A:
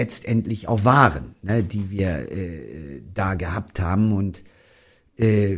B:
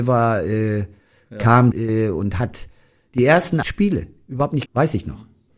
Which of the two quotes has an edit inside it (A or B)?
B